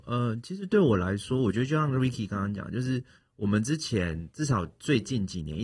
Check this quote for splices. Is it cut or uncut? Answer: uncut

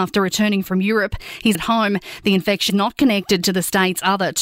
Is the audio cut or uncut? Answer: cut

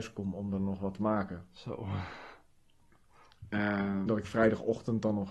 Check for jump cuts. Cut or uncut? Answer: cut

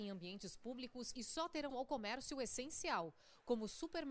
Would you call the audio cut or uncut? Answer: cut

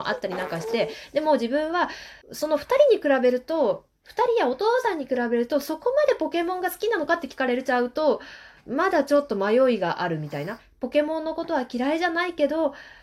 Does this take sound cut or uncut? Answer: cut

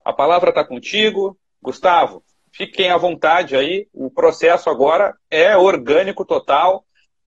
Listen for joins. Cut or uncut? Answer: uncut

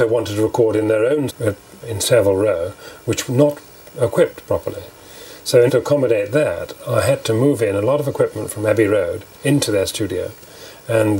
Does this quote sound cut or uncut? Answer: cut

